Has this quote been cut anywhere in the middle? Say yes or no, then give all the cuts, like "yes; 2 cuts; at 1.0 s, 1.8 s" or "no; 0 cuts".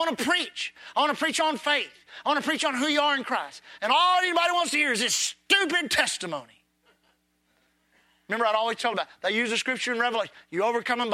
no; 0 cuts